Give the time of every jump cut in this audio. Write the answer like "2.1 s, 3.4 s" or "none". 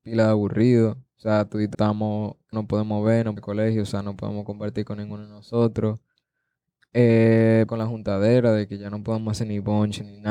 1.7 s, 2.5 s, 3.4 s, 7.7 s